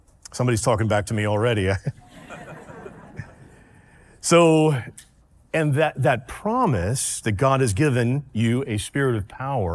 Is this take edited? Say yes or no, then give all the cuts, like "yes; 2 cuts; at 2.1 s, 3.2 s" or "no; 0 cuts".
no; 0 cuts